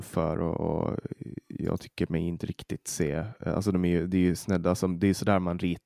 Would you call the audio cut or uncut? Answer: uncut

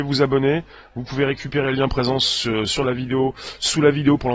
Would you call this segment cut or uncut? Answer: uncut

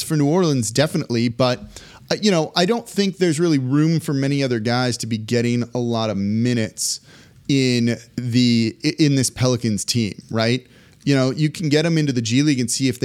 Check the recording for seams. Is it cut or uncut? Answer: uncut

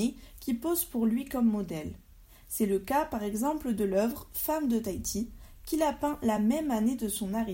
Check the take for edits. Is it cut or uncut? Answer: uncut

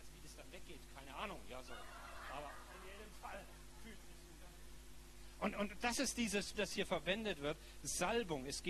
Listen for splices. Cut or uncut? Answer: cut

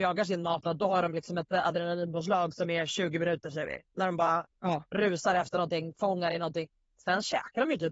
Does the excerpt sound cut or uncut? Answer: uncut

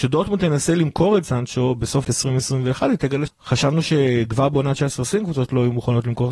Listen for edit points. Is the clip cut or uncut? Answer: cut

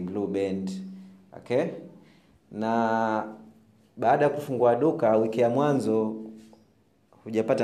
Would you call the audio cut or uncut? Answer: uncut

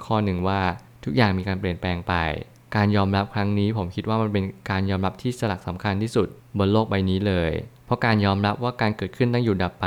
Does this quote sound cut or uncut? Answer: uncut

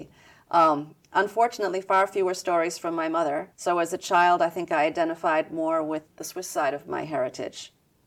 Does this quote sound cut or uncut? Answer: cut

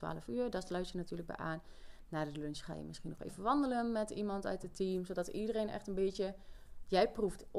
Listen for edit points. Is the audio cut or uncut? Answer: uncut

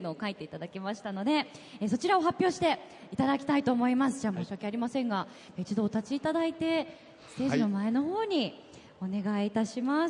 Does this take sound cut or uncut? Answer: uncut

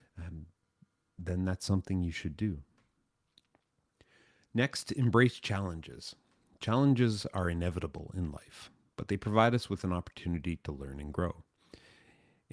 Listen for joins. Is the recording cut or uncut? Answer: uncut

